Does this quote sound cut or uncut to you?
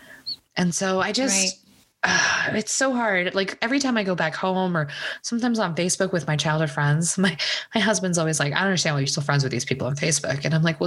uncut